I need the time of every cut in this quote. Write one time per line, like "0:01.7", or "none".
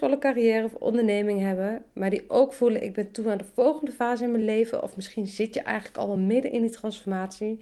none